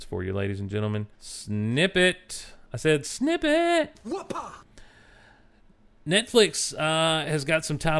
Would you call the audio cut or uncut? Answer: cut